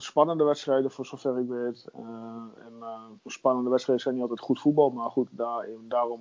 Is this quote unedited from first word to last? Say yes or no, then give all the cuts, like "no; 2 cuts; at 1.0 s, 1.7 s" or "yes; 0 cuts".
no; 1 cut; at 3.2 s